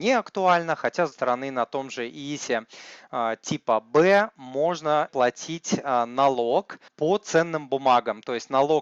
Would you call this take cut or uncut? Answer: cut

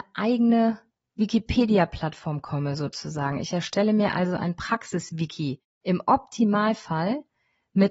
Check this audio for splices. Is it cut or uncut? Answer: cut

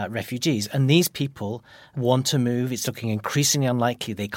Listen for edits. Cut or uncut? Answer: uncut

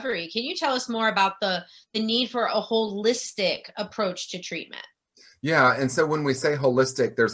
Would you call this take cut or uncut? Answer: uncut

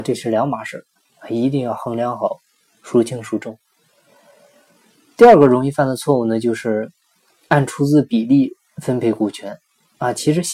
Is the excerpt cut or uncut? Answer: uncut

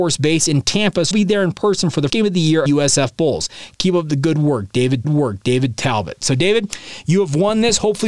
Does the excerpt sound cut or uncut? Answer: cut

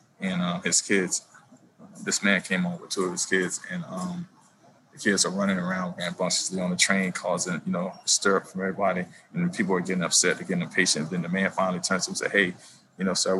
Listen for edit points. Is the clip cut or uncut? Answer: uncut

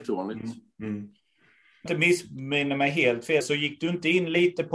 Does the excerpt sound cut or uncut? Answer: cut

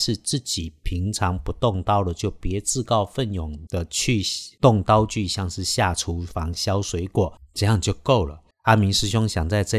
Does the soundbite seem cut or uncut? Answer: cut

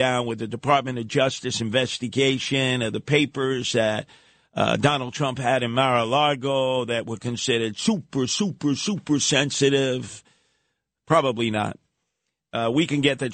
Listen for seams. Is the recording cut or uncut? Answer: uncut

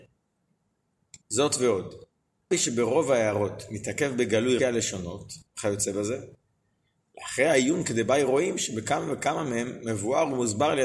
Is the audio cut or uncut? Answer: cut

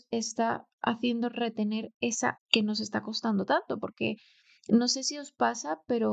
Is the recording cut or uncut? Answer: cut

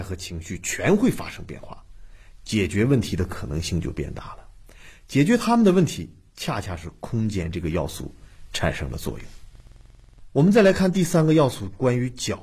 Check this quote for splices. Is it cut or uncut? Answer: uncut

